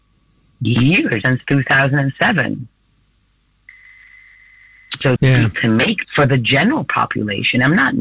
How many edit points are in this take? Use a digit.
4